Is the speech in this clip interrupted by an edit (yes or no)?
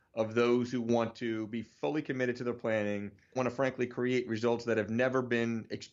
yes